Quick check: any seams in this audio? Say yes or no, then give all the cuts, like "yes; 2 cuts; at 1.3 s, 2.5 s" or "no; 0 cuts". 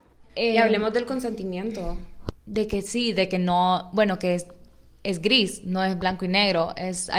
yes; 1 cut; at 2.4 s